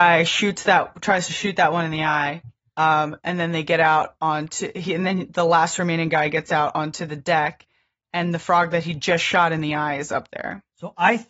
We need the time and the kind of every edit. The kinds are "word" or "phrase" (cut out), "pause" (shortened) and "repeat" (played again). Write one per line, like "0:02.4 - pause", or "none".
none